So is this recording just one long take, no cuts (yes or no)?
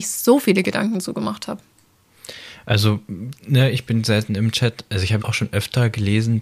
no